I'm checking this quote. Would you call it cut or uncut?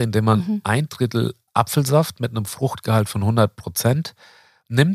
uncut